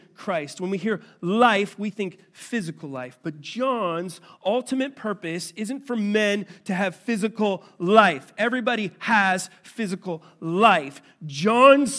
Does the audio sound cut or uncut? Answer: uncut